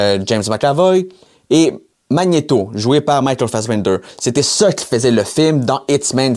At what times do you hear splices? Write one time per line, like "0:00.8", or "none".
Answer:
none